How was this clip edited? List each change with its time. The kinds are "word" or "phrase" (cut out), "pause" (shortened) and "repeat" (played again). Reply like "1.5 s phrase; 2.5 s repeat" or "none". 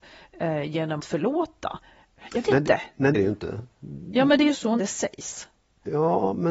1.0 s word; 2.4 s word; 3.1 s word; 4.8 s word